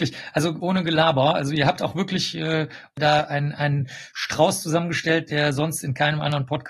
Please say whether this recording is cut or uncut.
uncut